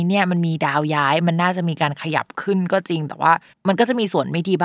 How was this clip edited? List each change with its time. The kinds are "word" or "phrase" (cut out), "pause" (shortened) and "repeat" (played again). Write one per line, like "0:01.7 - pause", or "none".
0:03.5 - pause